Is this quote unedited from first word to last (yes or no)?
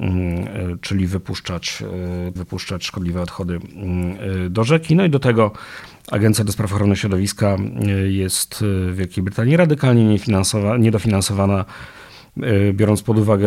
no